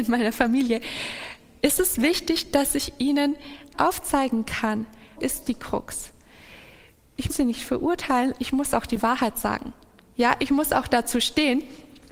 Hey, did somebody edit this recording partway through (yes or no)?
yes